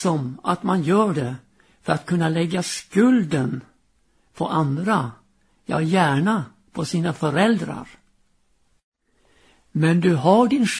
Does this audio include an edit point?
no; 0 cuts

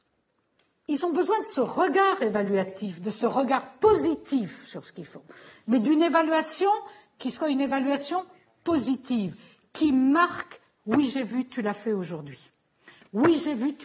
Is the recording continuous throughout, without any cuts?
yes; 0 cuts

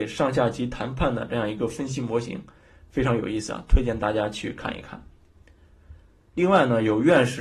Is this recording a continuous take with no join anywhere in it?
yes; 0 cuts

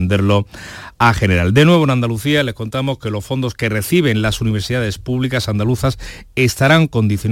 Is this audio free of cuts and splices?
yes; 0 cuts

